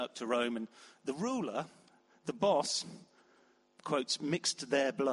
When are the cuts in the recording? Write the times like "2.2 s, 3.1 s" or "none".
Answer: none